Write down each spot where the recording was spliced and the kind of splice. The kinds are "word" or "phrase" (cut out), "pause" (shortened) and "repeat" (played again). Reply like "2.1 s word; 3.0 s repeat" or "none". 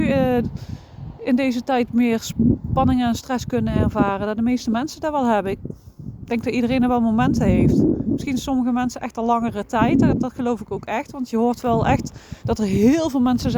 12.4 s pause